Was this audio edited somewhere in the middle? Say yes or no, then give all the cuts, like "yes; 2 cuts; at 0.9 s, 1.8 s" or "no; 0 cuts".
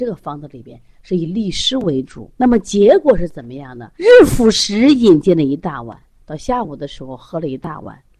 yes; 3 cuts; at 2.3 s, 3.9 s, 6.2 s